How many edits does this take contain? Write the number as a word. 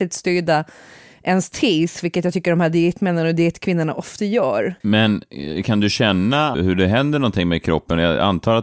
two